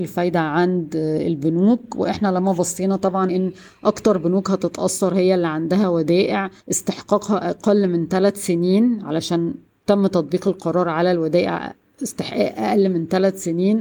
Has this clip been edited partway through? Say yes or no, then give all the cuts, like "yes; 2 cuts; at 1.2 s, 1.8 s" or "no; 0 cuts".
yes; 2 cuts; at 3.3 s, 6.6 s